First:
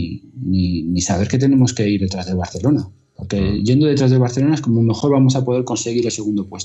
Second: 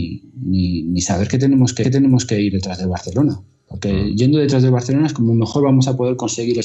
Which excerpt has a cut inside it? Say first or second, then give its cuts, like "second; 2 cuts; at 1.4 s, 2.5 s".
second; 1 cut; at 1.8 s